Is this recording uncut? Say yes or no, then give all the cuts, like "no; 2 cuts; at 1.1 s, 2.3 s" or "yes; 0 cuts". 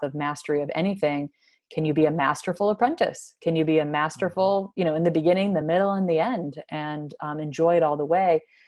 yes; 0 cuts